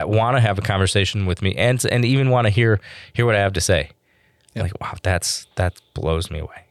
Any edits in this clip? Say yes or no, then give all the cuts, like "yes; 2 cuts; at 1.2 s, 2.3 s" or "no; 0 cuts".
no; 0 cuts